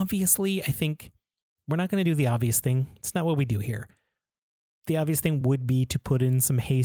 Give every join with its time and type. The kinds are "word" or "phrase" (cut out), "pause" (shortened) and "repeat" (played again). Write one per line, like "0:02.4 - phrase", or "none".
none